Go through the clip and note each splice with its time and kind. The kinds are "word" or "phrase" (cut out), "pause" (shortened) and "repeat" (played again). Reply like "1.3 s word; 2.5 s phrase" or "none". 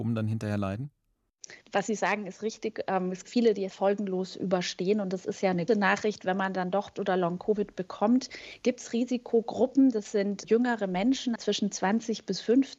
1.6 s pause; 3.2 s word; 3.7 s word; 5.7 s word; 6.9 s word; 10.4 s word; 11.4 s word